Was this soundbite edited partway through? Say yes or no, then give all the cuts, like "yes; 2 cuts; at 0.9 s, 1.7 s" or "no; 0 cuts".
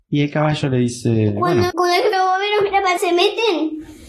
yes; 3 cuts; at 1.7 s, 2.1 s, 3.0 s